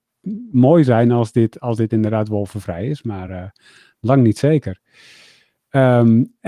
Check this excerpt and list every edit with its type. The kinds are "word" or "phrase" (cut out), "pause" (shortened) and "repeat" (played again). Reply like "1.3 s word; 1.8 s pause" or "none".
none